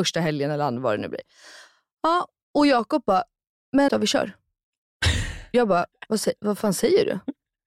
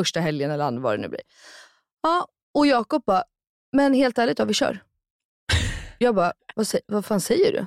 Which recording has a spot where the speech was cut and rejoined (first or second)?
first